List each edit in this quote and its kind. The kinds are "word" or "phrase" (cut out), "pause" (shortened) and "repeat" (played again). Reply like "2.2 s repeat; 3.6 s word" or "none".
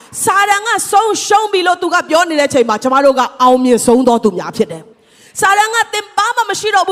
4.9 s pause